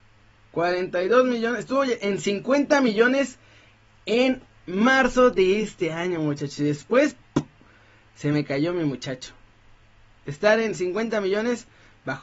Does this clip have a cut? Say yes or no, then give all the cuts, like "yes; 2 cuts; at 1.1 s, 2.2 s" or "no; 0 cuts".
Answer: no; 0 cuts